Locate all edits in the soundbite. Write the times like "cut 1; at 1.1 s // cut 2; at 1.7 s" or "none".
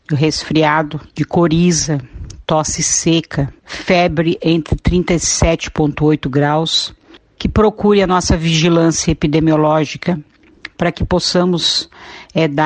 cut 1; at 1.1 s // cut 2; at 3.6 s